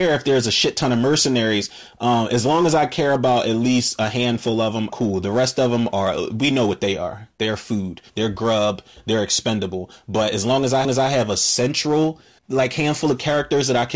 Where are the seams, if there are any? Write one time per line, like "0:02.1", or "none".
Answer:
0:04.9
0:08.1
0:10.8
0:12.4

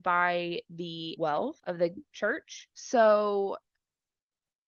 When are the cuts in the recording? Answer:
0:01.2
0:02.1

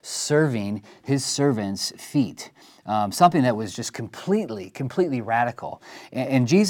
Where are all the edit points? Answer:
none

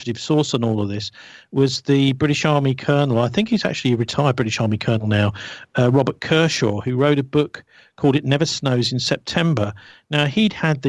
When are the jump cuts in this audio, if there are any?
none

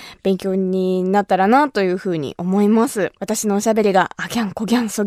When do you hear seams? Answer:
0:03.2

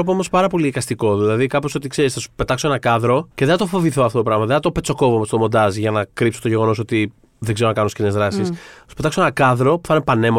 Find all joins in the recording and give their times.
0:03.3

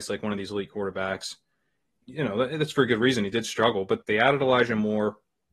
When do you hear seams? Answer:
0:02.0
0:04.0

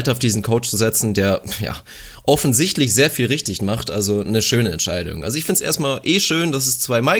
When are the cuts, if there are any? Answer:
none

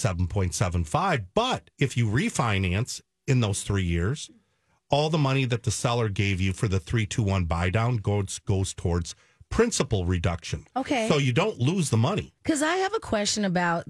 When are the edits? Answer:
0:01.7
0:12.4

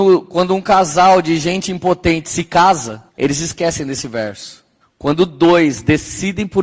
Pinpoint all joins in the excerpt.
0:03.1
0:04.8

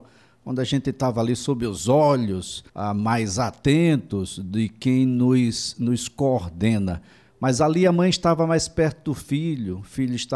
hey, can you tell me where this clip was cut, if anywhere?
0:02.7

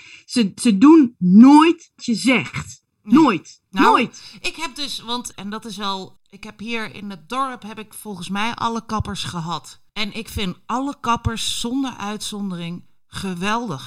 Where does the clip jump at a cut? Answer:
0:02.0
0:03.7
0:05.3
0:06.2
0:09.9

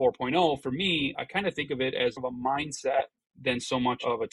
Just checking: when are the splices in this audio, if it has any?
0:01.1
0:02.2

